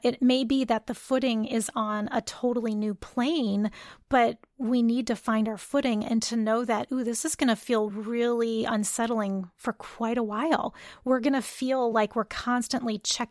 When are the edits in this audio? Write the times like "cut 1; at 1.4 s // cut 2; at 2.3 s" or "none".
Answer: none